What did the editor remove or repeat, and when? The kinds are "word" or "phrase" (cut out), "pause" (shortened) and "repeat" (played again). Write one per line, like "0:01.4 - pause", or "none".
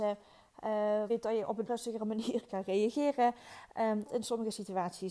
0:01.1 - word
0:01.7 - word
0:02.5 - word
0:04.1 - word